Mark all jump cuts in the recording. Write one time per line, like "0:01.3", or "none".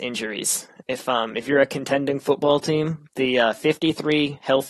none